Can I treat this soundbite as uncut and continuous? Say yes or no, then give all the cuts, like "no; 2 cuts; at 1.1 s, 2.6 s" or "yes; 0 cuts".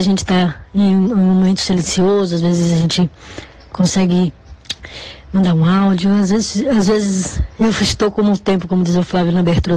yes; 0 cuts